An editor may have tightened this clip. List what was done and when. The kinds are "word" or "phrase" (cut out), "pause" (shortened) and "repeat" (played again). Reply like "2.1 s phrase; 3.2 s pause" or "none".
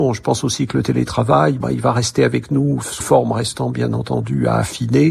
1.6 s word; 3.0 s word